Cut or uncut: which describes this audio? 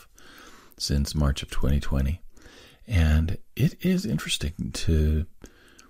uncut